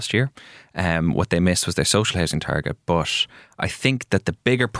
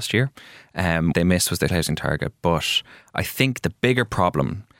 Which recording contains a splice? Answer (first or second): second